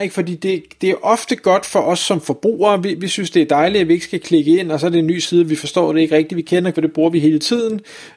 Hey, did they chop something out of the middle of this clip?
yes; 1 cut; at 6.7 s

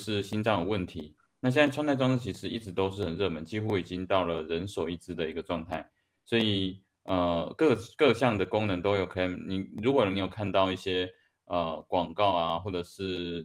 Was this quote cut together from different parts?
no; 0 cuts

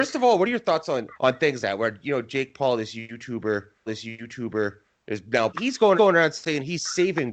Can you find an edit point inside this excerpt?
yes; 5 cuts; at 1.1 s, 1.6 s, 3.9 s, 5.5 s, 5.9 s

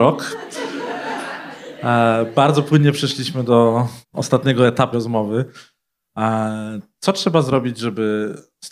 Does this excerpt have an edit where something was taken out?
yes; 2 cuts; at 4.0 s, 4.9 s

